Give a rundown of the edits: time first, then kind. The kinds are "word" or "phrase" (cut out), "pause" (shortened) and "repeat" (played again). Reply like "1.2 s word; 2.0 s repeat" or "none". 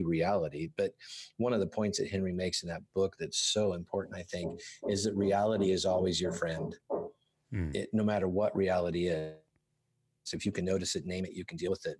none